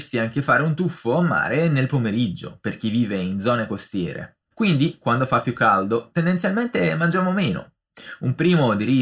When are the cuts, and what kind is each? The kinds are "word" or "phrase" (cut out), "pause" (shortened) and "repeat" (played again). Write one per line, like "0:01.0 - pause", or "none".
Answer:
0:04.4 - pause